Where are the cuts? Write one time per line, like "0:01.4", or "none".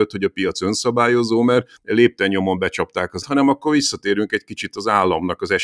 0:01.8
0:03.2